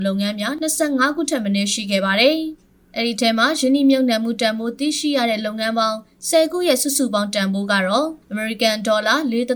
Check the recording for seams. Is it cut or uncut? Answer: cut